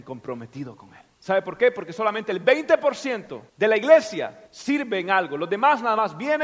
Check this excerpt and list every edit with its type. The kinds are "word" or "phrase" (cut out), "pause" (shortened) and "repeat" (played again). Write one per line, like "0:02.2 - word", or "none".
0:01.1 - pause
0:03.5 - pause
0:04.5 - pause